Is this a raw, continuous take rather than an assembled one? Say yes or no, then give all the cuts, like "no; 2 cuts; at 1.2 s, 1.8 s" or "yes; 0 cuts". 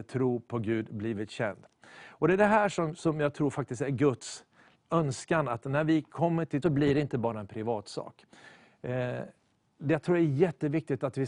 no; 1 cut; at 6.6 s